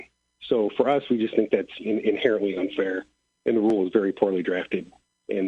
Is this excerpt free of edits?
yes; 0 cuts

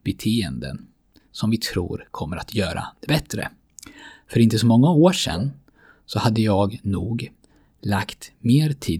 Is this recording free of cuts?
yes; 0 cuts

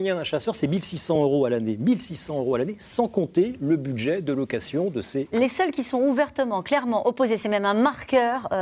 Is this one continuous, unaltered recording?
yes; 0 cuts

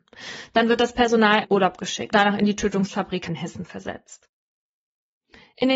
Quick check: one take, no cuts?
no; 3 cuts; at 1.4 s, 2.1 s, 3.3 s

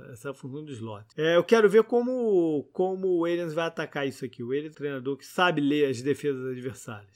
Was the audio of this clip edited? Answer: yes; 2 cuts; at 1.1 s, 4.7 s

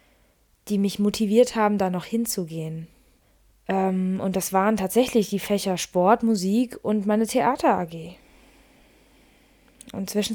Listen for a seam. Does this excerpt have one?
yes; 1 cut; at 3.2 s

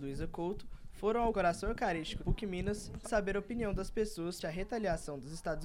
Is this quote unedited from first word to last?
no; 4 cuts; at 1.3 s, 2.2 s, 3.0 s, 4.4 s

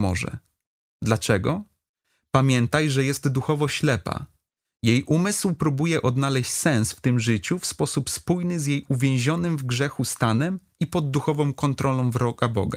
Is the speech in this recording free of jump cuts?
yes; 0 cuts

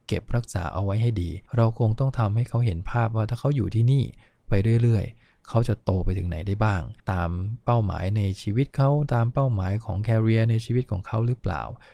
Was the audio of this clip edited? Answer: yes; 2 cuts; at 1.5 s, 7.0 s

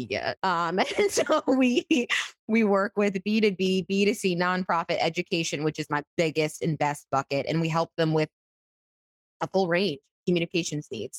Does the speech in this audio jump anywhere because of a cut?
yes; 1 cut; at 6.1 s

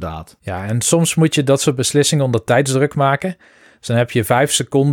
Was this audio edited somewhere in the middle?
no; 0 cuts

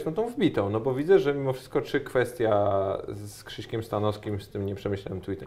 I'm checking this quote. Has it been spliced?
no; 0 cuts

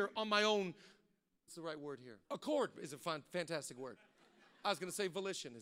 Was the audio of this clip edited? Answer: yes; 2 cuts; at 1.5 s, 2.2 s

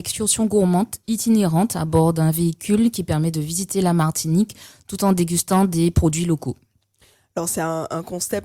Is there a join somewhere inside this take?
no; 0 cuts

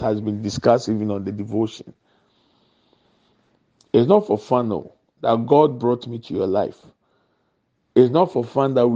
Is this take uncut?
yes; 0 cuts

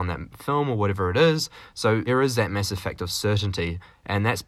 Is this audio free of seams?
no; 1 cut; at 2.1 s

